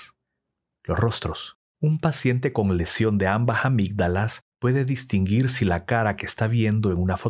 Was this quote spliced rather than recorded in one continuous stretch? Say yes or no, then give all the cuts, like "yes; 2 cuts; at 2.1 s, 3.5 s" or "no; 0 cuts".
yes; 2 cuts; at 1.7 s, 4.5 s